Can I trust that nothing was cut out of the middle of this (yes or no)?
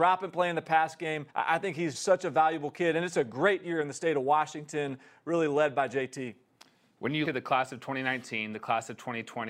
no